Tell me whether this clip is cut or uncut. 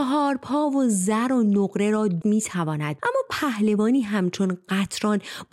cut